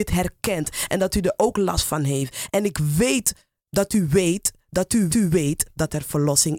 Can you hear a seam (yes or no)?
yes